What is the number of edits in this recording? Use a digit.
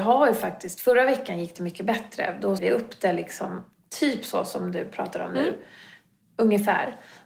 1